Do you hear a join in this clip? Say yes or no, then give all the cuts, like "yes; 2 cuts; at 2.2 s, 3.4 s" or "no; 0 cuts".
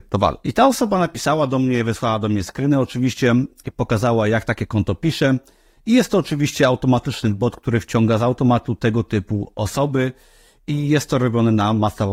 no; 0 cuts